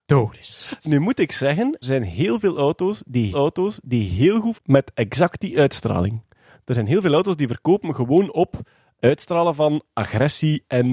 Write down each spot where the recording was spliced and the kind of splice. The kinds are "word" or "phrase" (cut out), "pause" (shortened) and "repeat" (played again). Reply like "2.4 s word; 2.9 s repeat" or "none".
1.8 s word; 3.3 s repeat; 4.5 s word

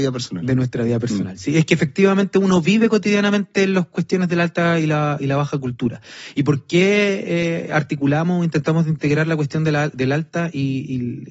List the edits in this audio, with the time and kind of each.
none

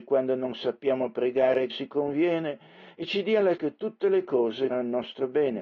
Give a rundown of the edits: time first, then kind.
1.7 s word; 3.6 s word; 4.7 s word

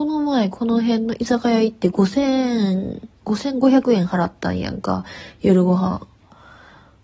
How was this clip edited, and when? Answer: none

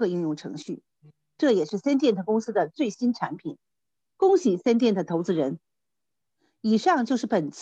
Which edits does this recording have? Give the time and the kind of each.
none

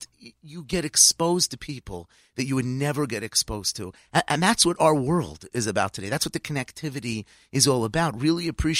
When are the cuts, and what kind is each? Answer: none

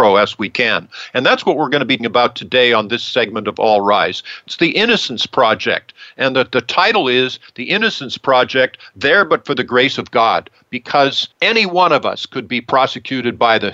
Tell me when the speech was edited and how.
2.0 s word; 11.3 s pause

